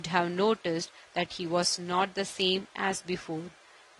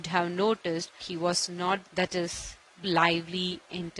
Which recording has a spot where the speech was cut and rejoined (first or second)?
second